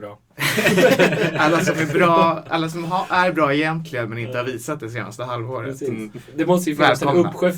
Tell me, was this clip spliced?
no; 0 cuts

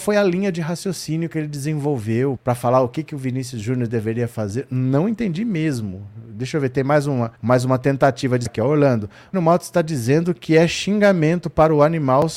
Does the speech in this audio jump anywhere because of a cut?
yes; 4 cuts; at 2.4 s, 7.4 s, 8.5 s, 9.3 s

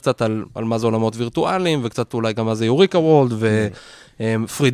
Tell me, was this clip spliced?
no; 0 cuts

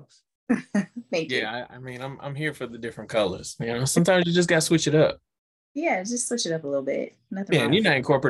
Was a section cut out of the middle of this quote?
no; 0 cuts

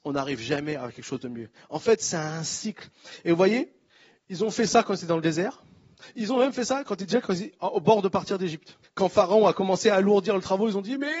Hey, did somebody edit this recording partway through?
yes; 2 cuts; at 3.9 s, 8.8 s

